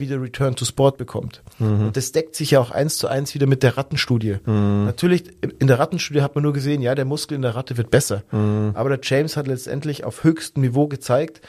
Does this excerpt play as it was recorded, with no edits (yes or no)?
yes